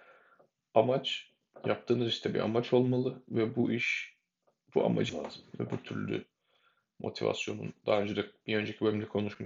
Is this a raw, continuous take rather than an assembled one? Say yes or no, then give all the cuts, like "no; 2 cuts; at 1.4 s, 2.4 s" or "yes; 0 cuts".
no; 1 cut; at 5.1 s